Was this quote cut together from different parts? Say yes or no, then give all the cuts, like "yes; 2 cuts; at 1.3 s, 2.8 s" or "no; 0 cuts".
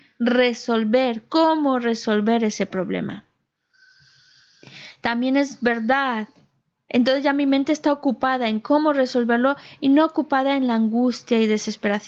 no; 0 cuts